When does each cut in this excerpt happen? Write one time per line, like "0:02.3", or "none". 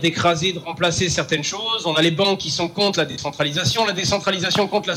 none

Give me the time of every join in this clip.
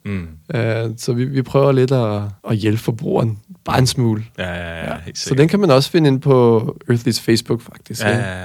0:02.4

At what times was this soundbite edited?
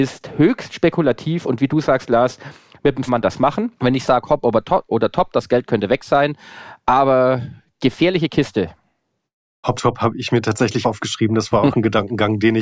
0:03.1
0:03.8
0:09.8
0:10.8

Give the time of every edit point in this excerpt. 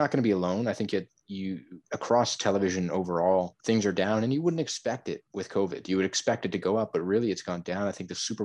0:01.8
0:03.6
0:05.3

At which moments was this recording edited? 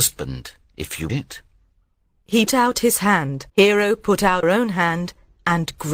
0:01.1
0:02.5
0:03.5
0:04.4

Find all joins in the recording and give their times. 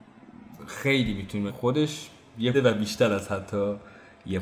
0:01.5
0:02.5

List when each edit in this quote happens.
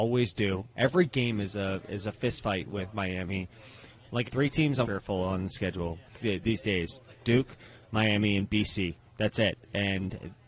0:04.3
0:04.8
0:06.2

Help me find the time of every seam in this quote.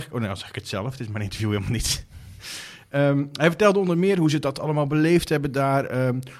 none

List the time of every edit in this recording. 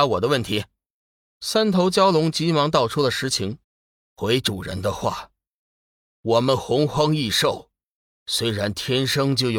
0:03.6

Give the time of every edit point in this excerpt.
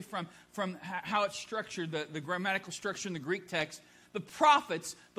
none

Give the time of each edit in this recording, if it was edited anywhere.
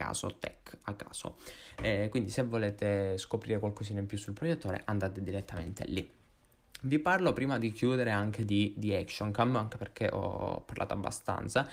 none

